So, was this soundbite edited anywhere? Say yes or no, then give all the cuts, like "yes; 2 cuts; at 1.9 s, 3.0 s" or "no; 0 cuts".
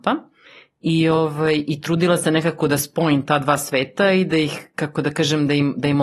no; 0 cuts